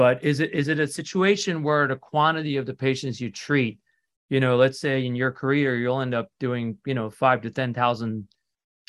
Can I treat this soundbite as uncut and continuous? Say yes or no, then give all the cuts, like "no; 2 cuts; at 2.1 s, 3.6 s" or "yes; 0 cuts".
yes; 0 cuts